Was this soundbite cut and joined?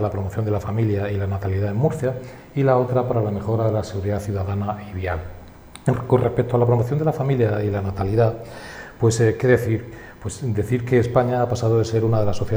no; 0 cuts

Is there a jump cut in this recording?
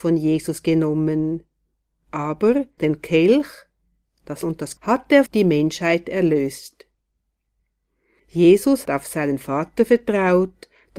yes; 5 cuts; at 2.8 s, 4.4 s, 4.8 s, 5.3 s, 8.9 s

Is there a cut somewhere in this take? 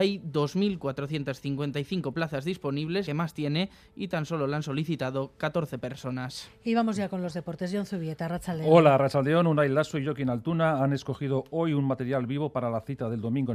yes; 1 cut; at 3.1 s

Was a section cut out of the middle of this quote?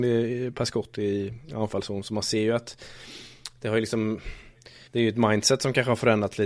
yes; 1 cut; at 4.9 s

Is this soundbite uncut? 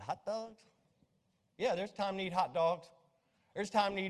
yes; 0 cuts

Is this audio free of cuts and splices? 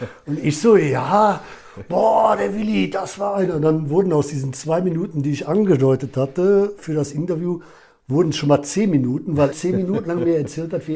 no; 1 cut; at 9.5 s

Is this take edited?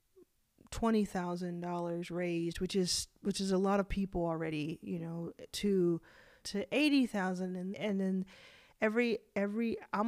yes; 2 cuts; at 6.4 s, 7.7 s

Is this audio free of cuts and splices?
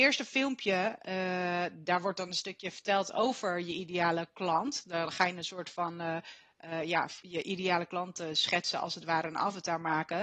yes; 0 cuts

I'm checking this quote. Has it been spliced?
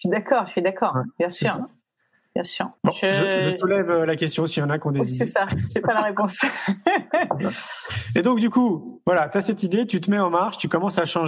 yes; 1 cut; at 2.8 s

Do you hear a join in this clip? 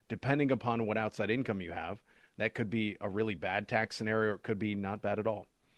no; 0 cuts

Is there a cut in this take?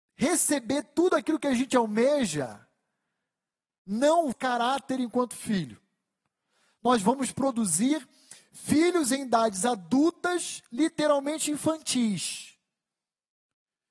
yes; 1 cut; at 4.3 s

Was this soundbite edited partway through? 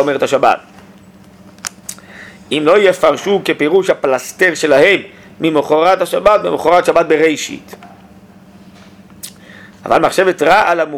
no; 0 cuts

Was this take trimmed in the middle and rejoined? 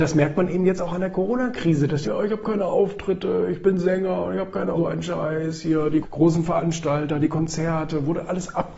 yes; 3 cuts; at 2.0 s, 4.8 s, 6.0 s

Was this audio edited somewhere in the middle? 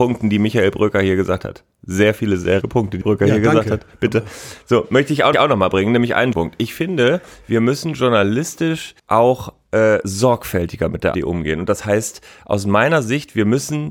yes; 6 cuts; at 2.6 s, 3.0 s, 5.3 s, 6.3 s, 9.0 s, 11.1 s

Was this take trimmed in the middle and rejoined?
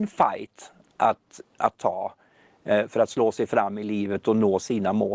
no; 0 cuts

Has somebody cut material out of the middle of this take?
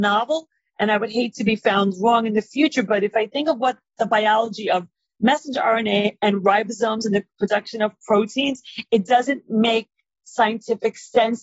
no; 0 cuts

